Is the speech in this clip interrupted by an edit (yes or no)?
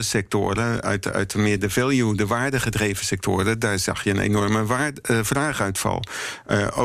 no